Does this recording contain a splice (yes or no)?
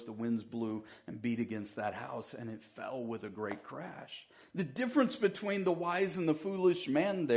no